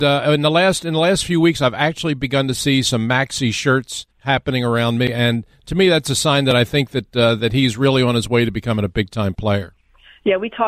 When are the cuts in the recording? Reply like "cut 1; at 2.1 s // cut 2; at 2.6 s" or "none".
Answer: cut 1; at 4.1 s